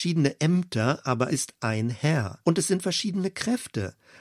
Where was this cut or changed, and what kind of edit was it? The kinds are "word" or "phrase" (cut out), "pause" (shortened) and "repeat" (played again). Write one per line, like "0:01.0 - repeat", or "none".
0:01.3 - word
0:02.4 - pause